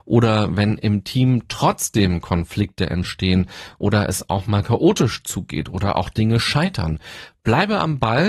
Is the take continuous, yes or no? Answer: yes